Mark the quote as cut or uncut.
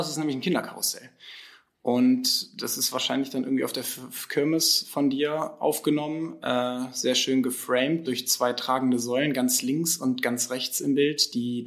uncut